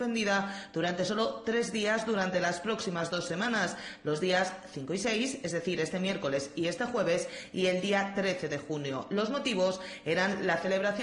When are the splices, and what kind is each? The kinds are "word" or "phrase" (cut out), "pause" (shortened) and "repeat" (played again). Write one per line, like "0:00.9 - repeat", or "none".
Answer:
none